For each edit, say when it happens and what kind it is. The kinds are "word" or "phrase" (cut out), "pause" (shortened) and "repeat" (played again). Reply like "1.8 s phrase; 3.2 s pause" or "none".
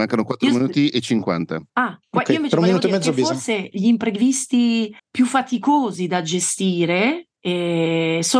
1.7 s pause; 5.0 s pause